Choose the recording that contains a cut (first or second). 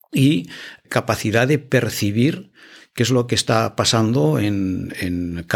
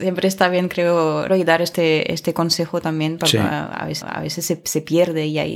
second